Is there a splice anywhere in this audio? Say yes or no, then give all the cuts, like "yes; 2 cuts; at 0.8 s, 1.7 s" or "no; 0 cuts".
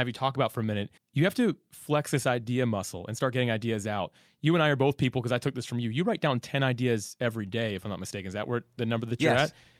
yes; 1 cut; at 1.0 s